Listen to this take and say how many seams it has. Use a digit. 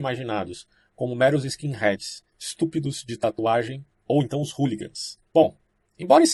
3